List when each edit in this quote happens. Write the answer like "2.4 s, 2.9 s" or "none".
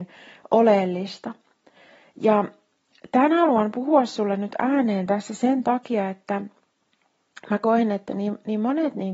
none